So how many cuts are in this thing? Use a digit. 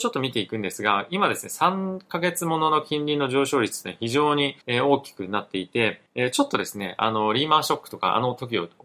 2